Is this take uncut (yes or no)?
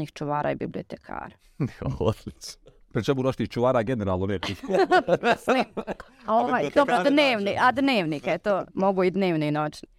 no